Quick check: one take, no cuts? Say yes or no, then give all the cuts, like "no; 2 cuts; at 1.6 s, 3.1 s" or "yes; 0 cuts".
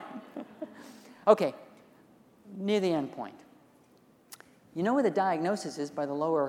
yes; 0 cuts